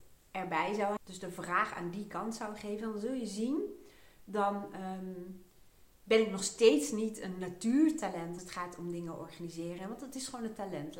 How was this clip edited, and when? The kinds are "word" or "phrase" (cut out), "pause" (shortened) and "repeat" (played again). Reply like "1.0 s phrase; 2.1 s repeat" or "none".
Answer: 1.0 s word; 8.4 s word